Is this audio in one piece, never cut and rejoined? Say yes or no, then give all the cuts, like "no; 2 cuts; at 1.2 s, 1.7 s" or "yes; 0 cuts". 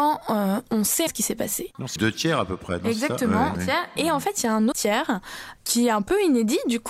no; 4 cuts; at 1.1 s, 2.0 s, 3.5 s, 4.7 s